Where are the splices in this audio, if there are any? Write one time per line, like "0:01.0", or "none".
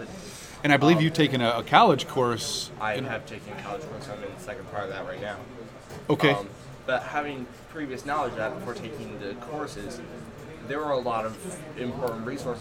none